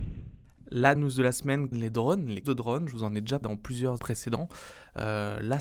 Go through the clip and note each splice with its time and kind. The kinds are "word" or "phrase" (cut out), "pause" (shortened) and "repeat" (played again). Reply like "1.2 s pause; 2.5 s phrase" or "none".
1.0 s word; 1.7 s word; 2.4 s word; 3.4 s word; 4.0 s word